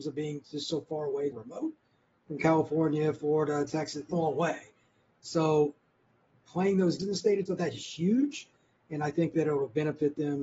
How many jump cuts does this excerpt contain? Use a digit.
4